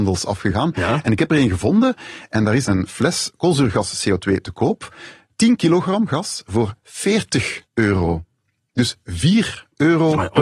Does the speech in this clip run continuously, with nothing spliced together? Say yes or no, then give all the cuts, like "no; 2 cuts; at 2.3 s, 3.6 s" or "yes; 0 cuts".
no; 2 cuts; at 2.6 s, 7.6 s